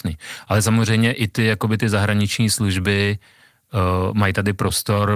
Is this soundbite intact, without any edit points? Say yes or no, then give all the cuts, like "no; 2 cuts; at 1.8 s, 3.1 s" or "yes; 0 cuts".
yes; 0 cuts